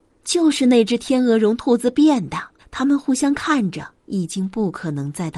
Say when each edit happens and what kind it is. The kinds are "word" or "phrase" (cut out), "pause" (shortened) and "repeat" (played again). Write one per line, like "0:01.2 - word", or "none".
0:02.6 - pause
0:04.0 - pause